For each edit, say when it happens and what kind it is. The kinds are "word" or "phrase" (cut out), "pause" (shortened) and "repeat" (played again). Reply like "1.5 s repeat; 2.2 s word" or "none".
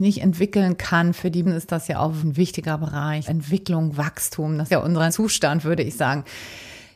1.4 s word; 2.2 s word; 3.3 s word; 4.7 s word; 5.1 s word